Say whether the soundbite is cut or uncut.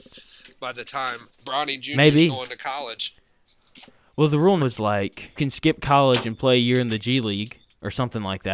cut